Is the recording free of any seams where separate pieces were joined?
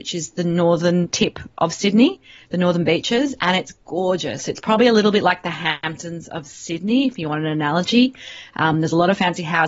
yes; 0 cuts

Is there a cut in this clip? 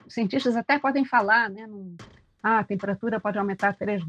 no; 0 cuts

